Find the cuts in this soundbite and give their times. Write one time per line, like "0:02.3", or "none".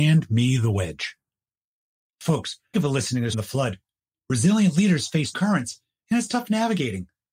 0:02.7
0:03.3
0:05.3